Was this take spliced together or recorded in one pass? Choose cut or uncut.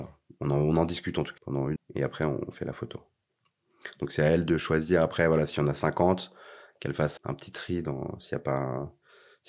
cut